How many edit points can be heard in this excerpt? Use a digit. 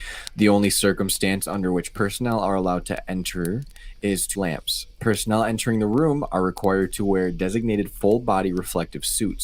1